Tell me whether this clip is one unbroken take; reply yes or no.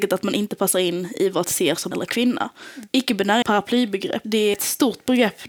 no